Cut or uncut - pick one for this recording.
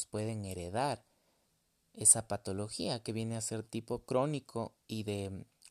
uncut